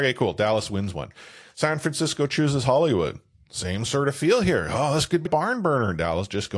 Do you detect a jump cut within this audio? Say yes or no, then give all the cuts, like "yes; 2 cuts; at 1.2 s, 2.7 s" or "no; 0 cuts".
yes; 1 cut; at 5.3 s